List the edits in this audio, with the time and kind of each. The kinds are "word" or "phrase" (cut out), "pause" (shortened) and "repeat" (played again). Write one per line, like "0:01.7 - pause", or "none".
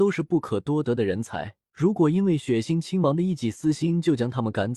0:01.7 - pause